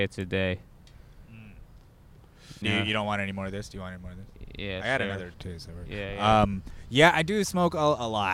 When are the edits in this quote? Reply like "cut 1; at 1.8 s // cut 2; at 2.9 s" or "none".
cut 1; at 2.6 s // cut 2; at 5.3 s